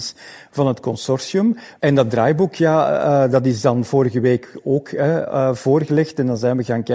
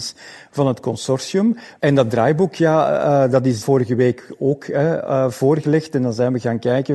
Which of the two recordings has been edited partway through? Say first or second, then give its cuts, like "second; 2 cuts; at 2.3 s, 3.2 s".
second; 1 cut; at 3.6 s